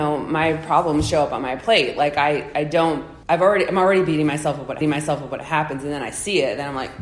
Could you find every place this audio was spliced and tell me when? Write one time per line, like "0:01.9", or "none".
0:02.5
0:03.2
0:04.8